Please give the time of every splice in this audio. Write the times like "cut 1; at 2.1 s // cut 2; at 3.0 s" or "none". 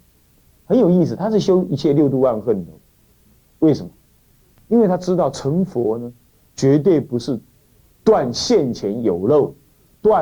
none